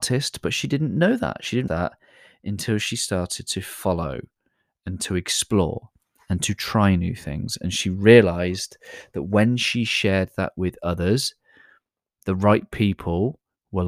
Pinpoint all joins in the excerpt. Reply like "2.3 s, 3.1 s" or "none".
1.7 s

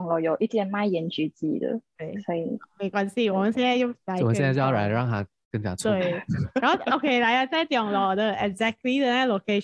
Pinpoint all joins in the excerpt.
none

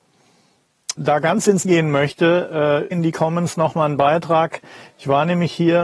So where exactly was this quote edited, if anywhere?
1.0 s, 1.6 s, 2.9 s

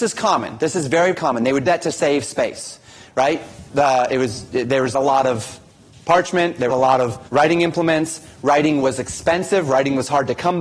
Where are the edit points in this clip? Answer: 1.1 s, 1.7 s, 3.7 s, 4.9 s, 6.7 s, 7.3 s

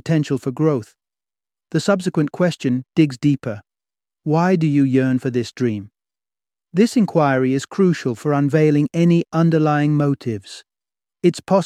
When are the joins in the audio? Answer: none

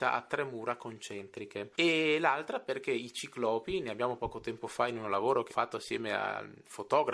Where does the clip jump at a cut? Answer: 4.2 s, 5.5 s

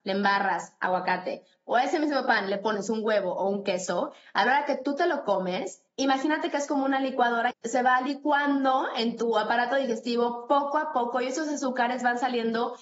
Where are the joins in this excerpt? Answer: 5.9 s, 7.5 s

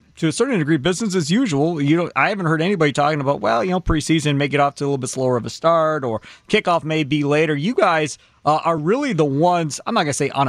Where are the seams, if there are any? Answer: none

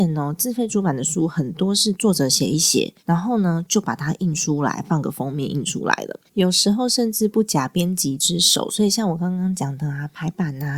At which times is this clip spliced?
3.0 s, 6.3 s

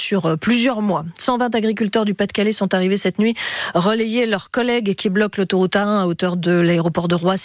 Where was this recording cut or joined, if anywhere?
none

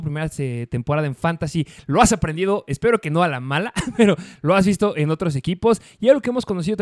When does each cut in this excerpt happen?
none

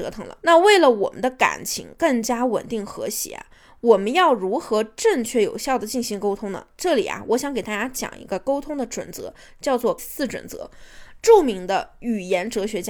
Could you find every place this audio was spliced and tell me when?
10.0 s

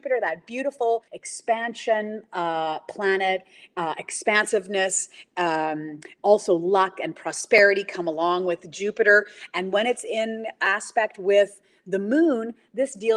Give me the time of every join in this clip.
1.1 s

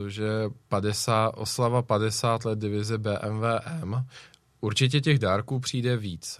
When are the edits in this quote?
none

